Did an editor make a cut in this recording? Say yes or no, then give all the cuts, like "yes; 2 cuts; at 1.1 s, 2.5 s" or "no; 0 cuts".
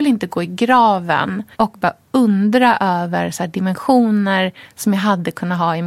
yes; 1 cut; at 1.5 s